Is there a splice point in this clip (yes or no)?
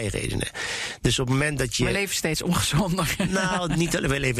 no